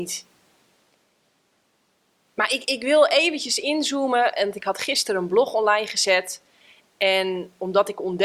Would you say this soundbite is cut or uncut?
cut